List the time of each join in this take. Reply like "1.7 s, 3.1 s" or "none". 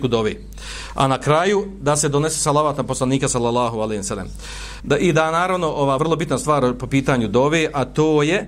4.8 s, 6.0 s